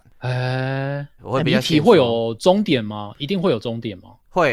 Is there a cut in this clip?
yes; 1 cut; at 1.2 s

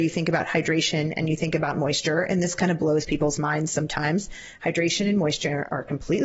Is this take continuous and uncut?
yes; 0 cuts

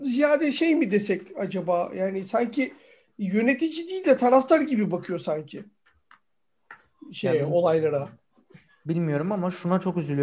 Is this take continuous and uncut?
yes; 0 cuts

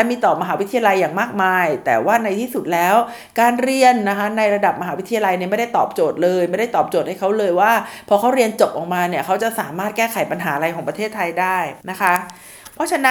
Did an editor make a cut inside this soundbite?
yes; 1 cut; at 11.8 s

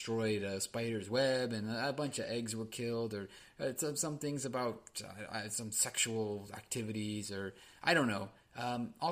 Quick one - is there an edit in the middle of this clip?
no; 0 cuts

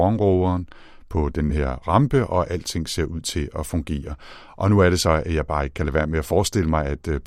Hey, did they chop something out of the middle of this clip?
no; 0 cuts

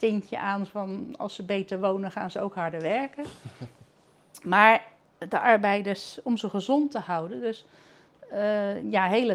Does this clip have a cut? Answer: no; 0 cuts

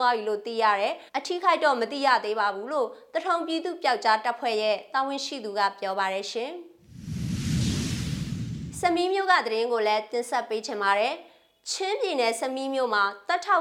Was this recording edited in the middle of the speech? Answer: yes; 1 cut; at 1.1 s

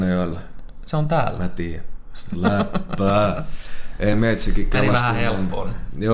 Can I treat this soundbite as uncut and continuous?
yes; 0 cuts

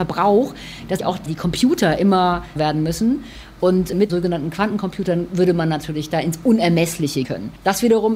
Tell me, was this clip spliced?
yes; 4 cuts; at 1.0 s, 2.6 s, 4.1 s, 7.2 s

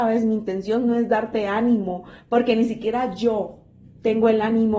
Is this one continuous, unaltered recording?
yes; 0 cuts

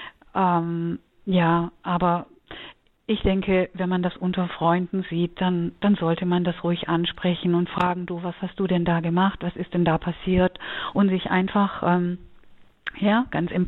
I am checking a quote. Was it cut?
no; 0 cuts

